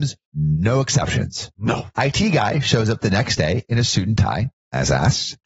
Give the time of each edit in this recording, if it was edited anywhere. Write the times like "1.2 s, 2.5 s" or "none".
none